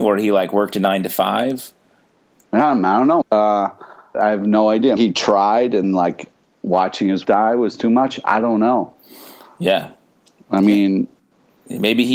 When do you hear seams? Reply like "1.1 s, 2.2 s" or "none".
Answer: 3.2 s, 4.1 s, 5.0 s, 5.8 s, 7.2 s